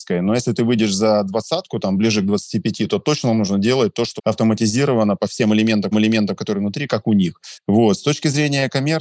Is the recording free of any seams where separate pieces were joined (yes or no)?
no